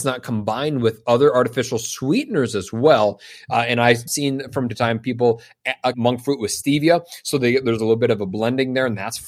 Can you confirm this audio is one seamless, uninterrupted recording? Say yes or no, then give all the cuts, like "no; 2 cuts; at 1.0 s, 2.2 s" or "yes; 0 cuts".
no; 3 cuts; at 4.1 s, 4.7 s, 5.9 s